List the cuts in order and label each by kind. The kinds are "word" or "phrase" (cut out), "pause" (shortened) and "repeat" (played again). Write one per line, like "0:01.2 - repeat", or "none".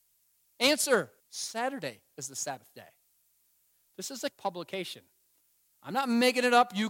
0:01.2 - pause
0:04.3 - word